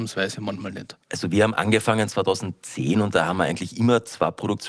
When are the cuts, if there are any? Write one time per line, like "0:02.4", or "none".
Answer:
0:01.0